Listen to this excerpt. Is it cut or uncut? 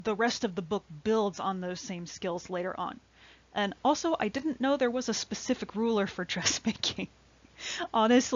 uncut